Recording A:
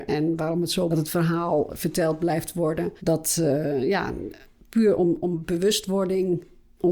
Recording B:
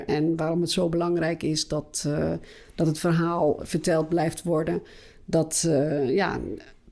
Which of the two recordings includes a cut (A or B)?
A